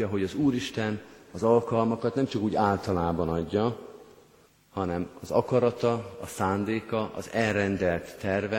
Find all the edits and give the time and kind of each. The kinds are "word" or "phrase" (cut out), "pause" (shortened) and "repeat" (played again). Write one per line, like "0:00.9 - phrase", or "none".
0:04.5 - pause